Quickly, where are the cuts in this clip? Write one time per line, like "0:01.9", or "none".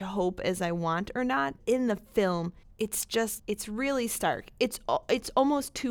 0:01.6
0:02.6
0:03.4